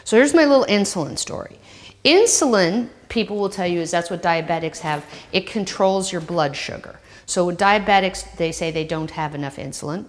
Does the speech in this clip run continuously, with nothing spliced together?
yes; 0 cuts

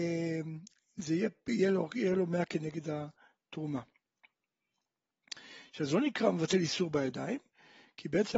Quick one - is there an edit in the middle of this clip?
no; 0 cuts

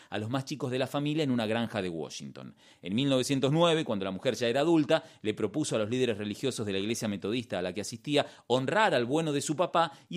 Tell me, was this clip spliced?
no; 0 cuts

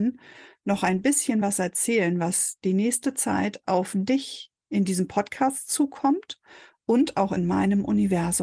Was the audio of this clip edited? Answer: no; 0 cuts

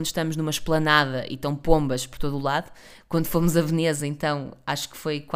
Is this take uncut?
yes; 0 cuts

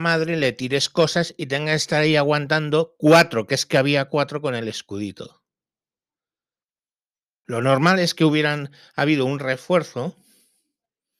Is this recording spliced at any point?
no; 0 cuts

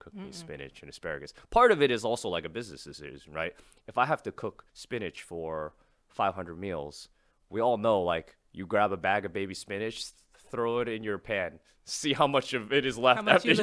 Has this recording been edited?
yes; 1 cut; at 4.7 s

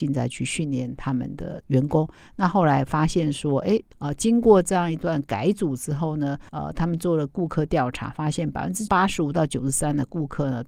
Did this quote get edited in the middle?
no; 0 cuts

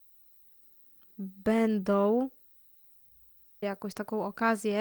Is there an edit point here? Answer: yes; 1 cut; at 3.6 s

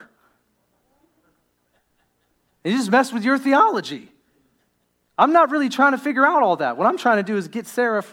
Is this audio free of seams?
yes; 0 cuts

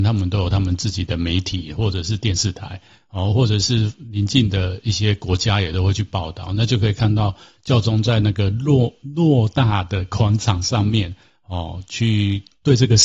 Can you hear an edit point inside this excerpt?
no; 0 cuts

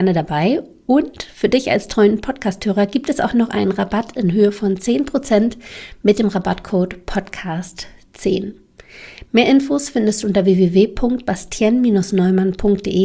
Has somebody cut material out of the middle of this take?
no; 0 cuts

